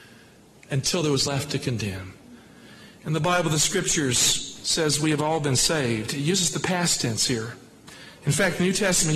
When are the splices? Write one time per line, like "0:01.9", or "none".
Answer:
0:01.3